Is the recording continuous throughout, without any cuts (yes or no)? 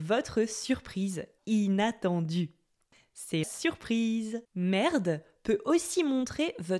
no